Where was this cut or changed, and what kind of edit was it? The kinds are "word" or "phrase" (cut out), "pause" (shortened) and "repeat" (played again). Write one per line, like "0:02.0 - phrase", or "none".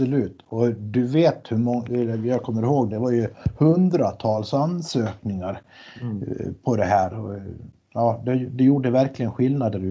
none